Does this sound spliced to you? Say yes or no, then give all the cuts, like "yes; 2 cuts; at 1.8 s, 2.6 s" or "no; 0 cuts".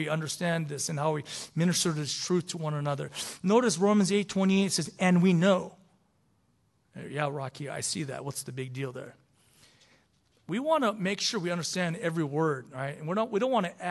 no; 0 cuts